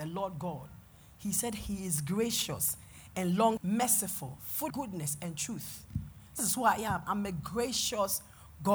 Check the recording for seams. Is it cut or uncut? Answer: cut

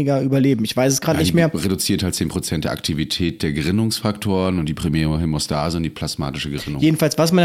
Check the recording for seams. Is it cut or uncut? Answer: uncut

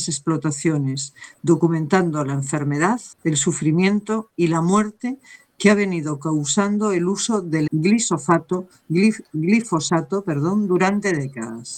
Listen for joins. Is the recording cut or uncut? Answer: cut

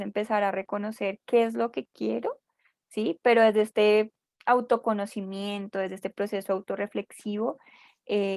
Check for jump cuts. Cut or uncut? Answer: uncut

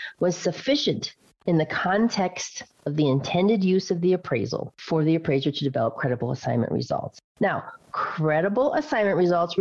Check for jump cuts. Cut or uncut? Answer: uncut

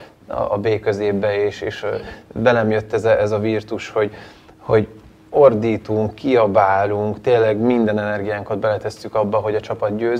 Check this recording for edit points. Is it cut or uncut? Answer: uncut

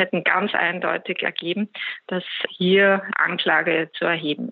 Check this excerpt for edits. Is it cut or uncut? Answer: cut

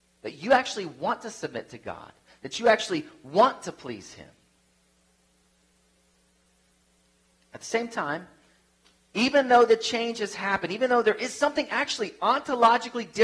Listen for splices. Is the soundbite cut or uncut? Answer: uncut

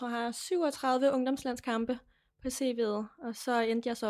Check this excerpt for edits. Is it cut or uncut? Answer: uncut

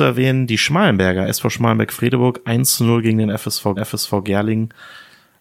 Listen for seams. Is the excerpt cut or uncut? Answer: cut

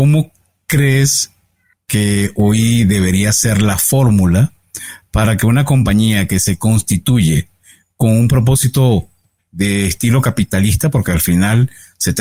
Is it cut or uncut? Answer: uncut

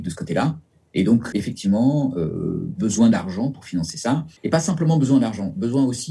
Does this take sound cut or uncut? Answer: cut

